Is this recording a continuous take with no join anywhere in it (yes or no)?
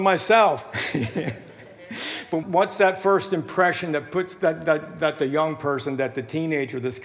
no